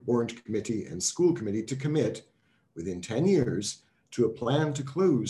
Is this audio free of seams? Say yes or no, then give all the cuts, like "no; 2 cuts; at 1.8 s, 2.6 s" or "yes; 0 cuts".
yes; 0 cuts